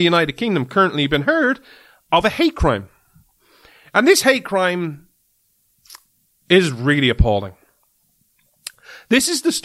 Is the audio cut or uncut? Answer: uncut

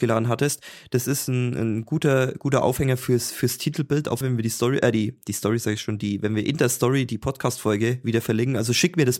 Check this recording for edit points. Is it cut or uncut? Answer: cut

